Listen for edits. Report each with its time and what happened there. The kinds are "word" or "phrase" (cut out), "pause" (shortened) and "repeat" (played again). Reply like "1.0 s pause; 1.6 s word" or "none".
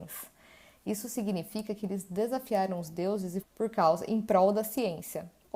3.4 s phrase